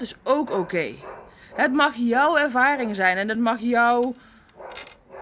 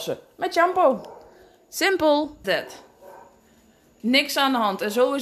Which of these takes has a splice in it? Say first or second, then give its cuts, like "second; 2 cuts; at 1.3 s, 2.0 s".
second; 1 cut; at 2.4 s